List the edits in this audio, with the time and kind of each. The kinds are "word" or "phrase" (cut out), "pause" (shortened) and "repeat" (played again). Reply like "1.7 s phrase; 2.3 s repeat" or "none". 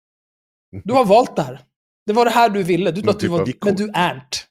3.0 s word; 3.5 s word